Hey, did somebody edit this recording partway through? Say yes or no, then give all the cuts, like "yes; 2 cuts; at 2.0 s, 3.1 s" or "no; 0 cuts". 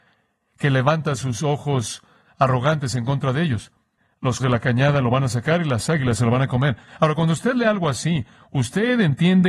yes; 1 cut; at 4.4 s